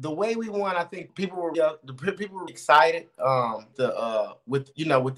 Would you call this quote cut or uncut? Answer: cut